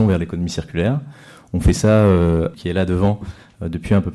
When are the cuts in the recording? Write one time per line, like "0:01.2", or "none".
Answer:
0:02.5

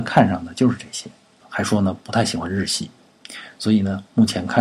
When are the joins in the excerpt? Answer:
0:01.4

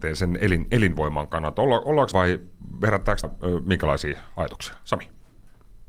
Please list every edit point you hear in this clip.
0:02.1
0:03.2

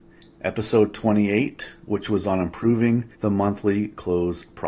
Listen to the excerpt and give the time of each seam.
0:03.1

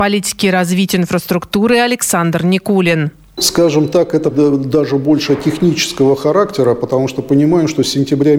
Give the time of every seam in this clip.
0:04.3
0:05.3

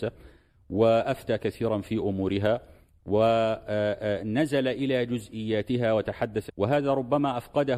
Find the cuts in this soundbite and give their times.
0:06.5

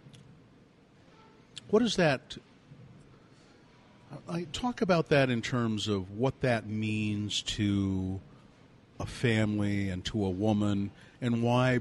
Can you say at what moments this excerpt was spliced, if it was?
none

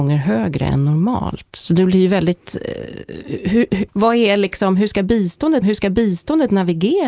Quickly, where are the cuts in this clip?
0:03.9
0:05.6

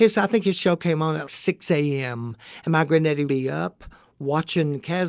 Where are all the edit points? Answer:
0:01.3
0:03.3

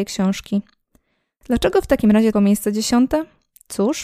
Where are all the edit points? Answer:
0:02.3

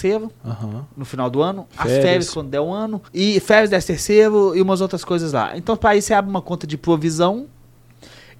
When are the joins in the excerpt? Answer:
0:03.1

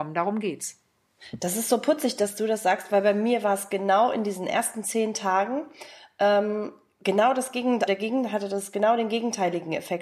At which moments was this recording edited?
0:07.9

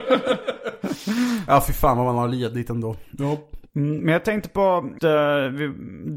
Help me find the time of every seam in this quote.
0:05.0

